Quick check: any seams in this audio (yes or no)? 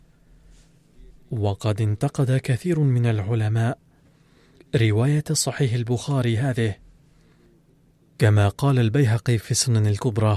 no